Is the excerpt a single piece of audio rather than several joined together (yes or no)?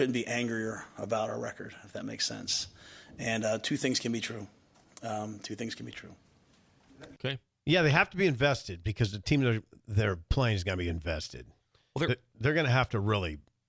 yes